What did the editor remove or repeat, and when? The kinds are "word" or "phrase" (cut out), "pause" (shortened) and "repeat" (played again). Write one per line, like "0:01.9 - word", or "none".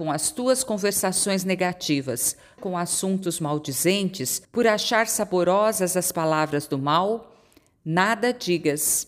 0:02.6 - word
0:04.4 - pause